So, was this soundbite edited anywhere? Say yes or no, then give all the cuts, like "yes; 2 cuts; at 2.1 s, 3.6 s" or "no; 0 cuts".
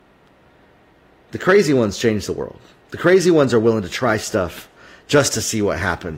no; 0 cuts